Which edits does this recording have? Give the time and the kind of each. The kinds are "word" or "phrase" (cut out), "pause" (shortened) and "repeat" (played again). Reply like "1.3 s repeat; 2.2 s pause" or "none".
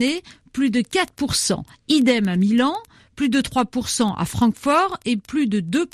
none

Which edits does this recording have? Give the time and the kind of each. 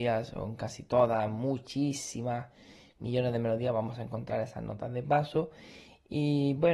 none

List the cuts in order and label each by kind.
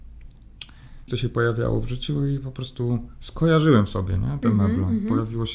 1.1 s word

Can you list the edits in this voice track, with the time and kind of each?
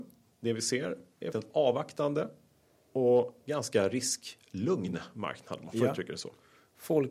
1.3 s word

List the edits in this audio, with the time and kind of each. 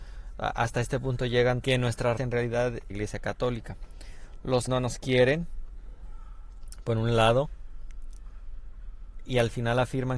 1.6 s word; 2.2 s word; 2.9 s phrase; 4.7 s word

